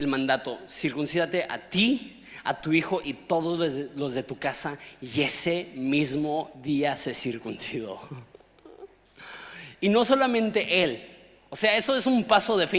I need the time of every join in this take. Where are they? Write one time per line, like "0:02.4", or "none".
none